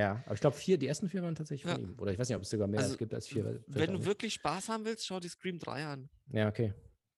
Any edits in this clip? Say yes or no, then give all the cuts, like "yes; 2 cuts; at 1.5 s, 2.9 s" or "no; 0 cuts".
no; 0 cuts